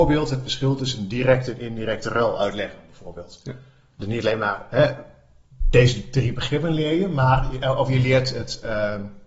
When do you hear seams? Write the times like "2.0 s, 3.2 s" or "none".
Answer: none